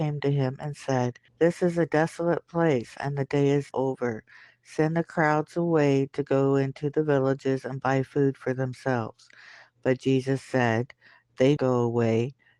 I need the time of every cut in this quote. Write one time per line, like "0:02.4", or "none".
0:01.3
0:03.7
0:11.6

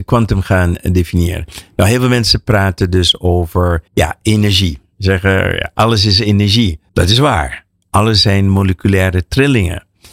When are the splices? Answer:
0:03.9
0:06.9

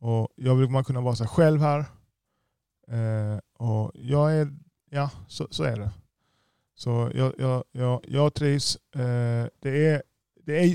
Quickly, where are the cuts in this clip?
none

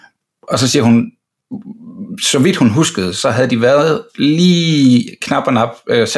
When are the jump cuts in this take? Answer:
none

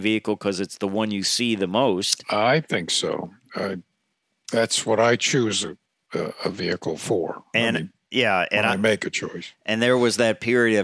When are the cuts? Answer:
none

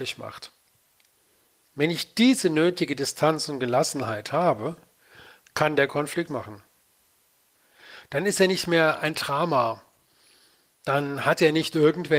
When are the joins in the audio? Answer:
0:06.3

